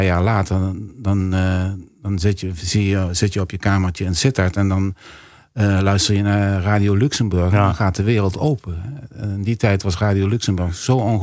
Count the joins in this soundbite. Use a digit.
0